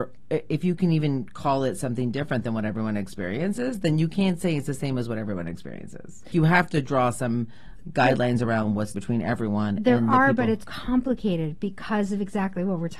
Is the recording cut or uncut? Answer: cut